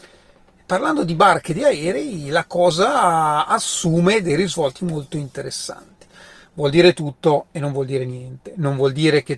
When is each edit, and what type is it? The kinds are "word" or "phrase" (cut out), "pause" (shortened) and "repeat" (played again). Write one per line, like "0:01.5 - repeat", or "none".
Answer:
none